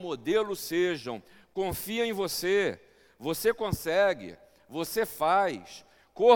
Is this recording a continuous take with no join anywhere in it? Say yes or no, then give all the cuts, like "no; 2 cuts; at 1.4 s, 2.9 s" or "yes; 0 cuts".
yes; 0 cuts